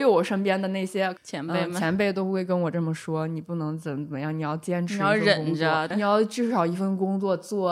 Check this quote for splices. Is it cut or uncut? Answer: cut